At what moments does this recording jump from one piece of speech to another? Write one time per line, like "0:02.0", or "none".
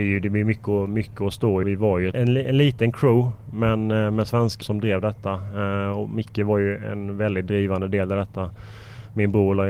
0:01.6
0:02.1
0:04.6